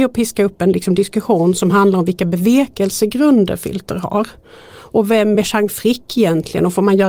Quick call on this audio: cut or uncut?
uncut